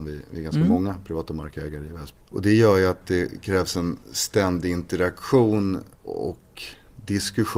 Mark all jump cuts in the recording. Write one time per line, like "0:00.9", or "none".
0:04.0
0:05.9